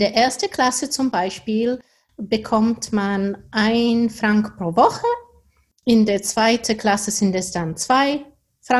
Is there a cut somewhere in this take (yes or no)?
no